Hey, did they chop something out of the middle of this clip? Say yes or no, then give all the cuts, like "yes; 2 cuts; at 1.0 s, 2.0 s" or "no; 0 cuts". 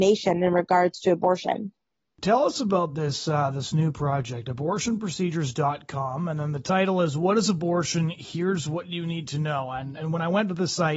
no; 0 cuts